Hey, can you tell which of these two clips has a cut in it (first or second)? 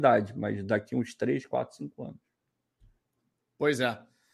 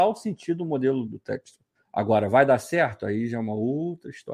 second